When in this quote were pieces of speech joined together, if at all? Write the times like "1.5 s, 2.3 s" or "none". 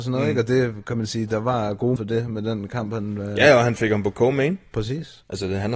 2.0 s